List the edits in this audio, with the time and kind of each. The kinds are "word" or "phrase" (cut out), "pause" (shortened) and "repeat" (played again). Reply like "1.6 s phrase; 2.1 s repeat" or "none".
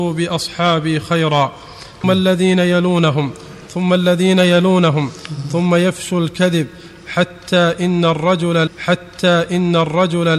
2.0 s word; 8.7 s repeat